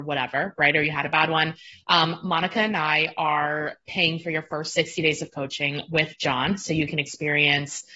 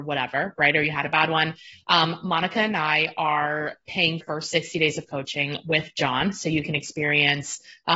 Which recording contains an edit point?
second; 1 cut; at 4.2 s

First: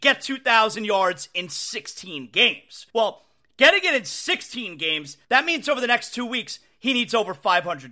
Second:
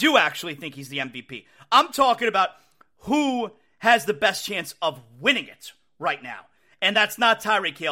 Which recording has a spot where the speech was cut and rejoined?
first; 2 cuts; at 2.9 s, 5.2 s

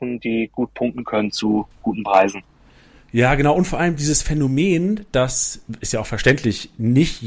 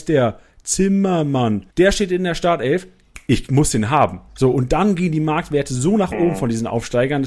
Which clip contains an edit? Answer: second; 2 cuts; at 1.7 s, 4.3 s

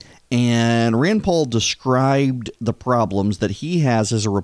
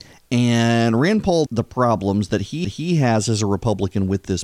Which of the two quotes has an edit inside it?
second; 2 cuts; at 1.5 s, 2.6 s

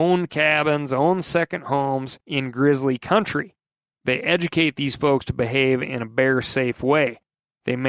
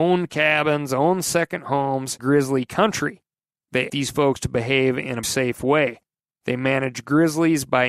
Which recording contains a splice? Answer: second; 3 cuts; at 2.2 s, 3.9 s, 5.2 s

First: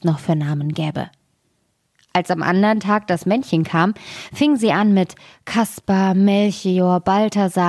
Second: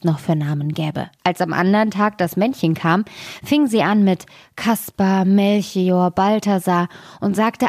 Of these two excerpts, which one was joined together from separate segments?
second; 1 cut; at 1.2 s

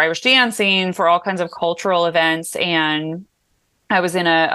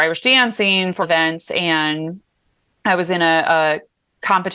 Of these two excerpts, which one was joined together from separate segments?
second; 1 cut; at 1.0 s

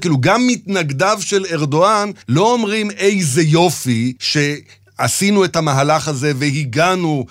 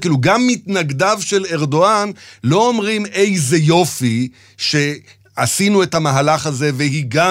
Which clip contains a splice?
first; 2 cuts; at 2.2 s, 4.2 s

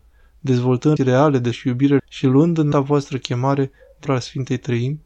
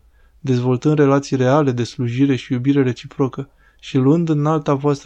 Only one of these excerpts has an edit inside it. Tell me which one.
first; 5 cuts; at 1.0 s, 1.5 s, 2.0 s, 2.7 s, 4.1 s

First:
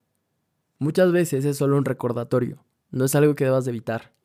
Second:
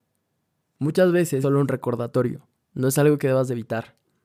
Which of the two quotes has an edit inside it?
second; 1 cut; at 1.4 s

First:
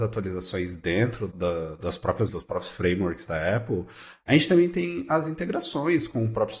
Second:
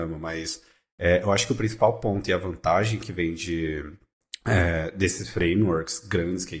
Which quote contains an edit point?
first; 2 cuts; at 1.3 s, 2.3 s

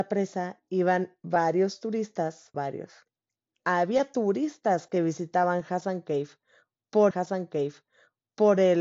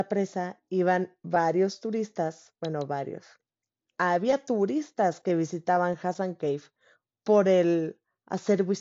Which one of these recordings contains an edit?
first; 2 cuts; at 2.5 s, 7.1 s

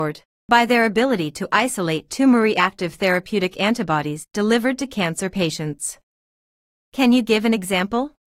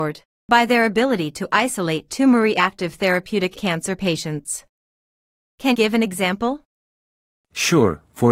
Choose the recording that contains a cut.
second; 2 cuts; at 3.5 s, 5.7 s

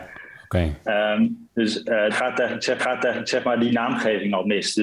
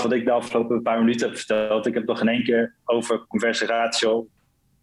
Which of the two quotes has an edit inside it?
first; 3 cuts; at 1.5 s, 2.1 s, 2.8 s

